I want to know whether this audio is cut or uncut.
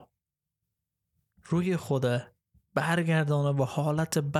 uncut